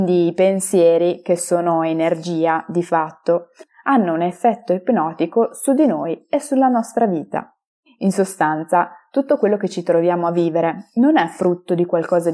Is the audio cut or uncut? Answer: uncut